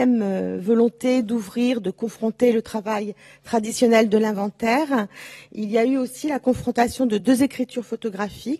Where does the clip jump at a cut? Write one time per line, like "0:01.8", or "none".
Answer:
none